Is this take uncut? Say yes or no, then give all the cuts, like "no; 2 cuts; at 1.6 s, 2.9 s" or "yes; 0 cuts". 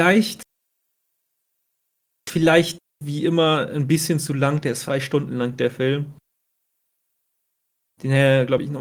no; 2 cuts; at 3.0 s, 4.9 s